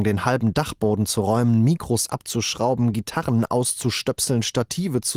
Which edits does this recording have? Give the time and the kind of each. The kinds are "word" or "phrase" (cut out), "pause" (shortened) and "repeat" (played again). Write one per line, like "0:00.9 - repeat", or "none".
none